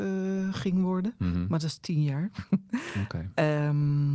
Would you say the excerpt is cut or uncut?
uncut